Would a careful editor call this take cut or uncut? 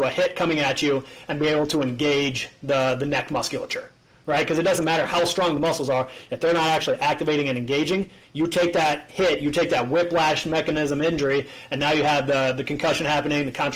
uncut